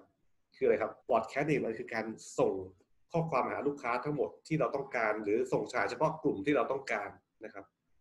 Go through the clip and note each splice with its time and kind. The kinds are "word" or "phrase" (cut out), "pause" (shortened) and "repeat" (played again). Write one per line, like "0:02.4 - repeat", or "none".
0:01.0 - pause